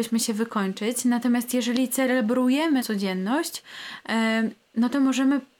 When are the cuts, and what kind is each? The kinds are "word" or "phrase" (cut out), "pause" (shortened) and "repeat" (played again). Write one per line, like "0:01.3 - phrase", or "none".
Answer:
0:02.8 - word